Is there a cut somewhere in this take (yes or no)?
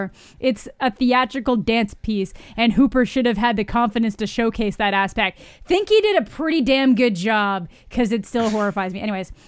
no